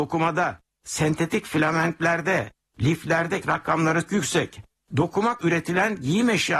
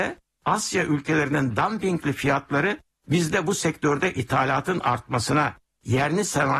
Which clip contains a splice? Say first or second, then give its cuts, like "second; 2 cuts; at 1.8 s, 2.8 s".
first; 3 cuts; at 3.4 s, 4.1 s, 5.4 s